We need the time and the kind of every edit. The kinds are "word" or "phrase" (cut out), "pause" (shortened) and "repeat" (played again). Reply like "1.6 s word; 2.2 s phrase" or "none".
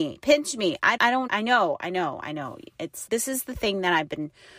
1.0 s word; 1.3 s word; 3.1 s word